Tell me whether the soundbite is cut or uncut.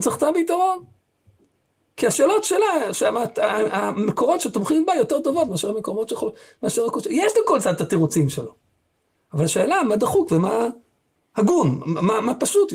uncut